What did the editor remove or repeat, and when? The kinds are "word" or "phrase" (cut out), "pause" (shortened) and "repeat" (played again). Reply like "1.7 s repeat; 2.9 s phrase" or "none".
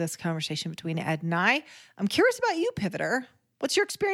none